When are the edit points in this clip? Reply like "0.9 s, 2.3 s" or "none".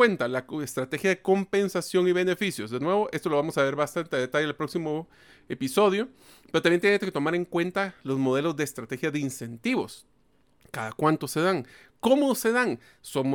none